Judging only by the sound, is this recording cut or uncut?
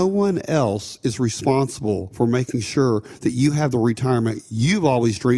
uncut